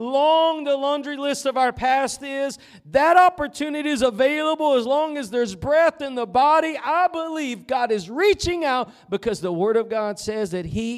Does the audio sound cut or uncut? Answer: uncut